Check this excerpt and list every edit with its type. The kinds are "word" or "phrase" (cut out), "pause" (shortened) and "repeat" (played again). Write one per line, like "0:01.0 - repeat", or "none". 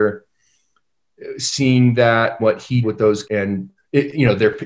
0:02.4 - word
0:02.8 - word
0:03.2 - word
0:03.8 - word